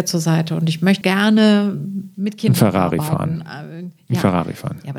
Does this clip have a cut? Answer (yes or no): yes